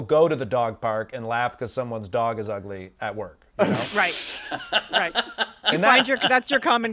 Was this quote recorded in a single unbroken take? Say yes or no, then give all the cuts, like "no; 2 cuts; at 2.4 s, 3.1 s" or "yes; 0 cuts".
yes; 0 cuts